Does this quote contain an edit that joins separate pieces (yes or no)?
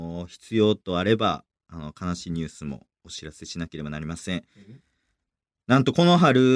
no